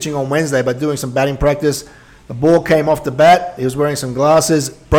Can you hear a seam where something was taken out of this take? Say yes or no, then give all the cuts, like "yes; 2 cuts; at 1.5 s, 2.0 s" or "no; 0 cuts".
no; 0 cuts